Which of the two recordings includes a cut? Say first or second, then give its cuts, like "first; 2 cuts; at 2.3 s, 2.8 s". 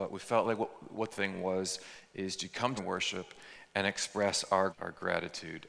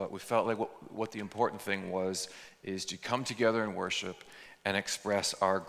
first; 3 cuts; at 1.1 s, 2.8 s, 4.7 s